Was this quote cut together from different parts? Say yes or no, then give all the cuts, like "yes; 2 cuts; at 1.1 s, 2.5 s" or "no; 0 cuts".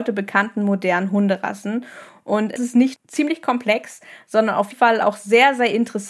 yes; 3 cuts; at 2.6 s, 3.0 s, 4.7 s